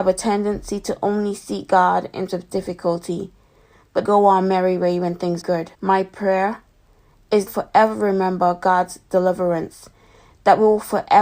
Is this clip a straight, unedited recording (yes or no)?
no